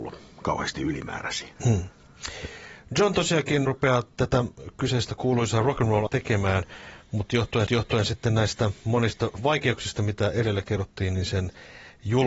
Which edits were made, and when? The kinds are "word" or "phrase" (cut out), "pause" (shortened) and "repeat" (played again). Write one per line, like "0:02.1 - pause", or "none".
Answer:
0:01.6 - pause
0:03.7 - word
0:06.1 - word
0:07.7 - repeat

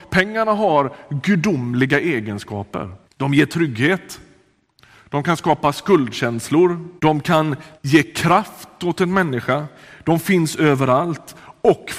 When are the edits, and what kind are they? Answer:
0:03.0 - pause
0:07.0 - pause
0:07.8 - pause

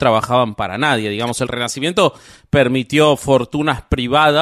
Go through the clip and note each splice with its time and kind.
none

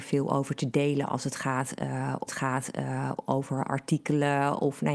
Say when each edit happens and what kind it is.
0:02.3 - repeat

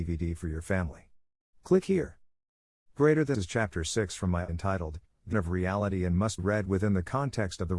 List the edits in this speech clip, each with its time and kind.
0:03.3 - word
0:04.5 - word
0:05.3 - word
0:06.4 - word

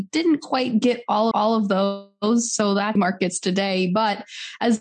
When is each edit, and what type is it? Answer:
0:01.3 - repeat
0:03.0 - phrase

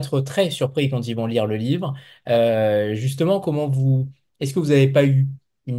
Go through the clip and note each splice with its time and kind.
none

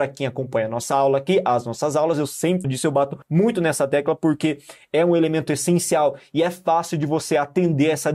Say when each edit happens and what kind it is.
0:02.6 - word
0:03.2 - pause

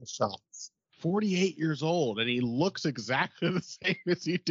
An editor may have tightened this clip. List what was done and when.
none

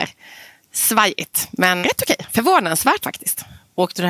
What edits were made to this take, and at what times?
0:01.8 - word
0:03.0 - word

